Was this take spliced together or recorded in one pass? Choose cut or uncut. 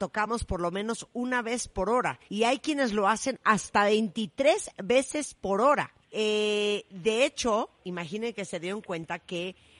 cut